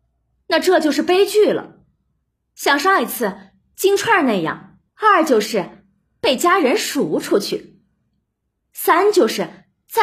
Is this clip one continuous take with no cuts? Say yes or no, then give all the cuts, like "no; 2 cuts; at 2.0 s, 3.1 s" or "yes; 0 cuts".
no; 1 cut; at 4.9 s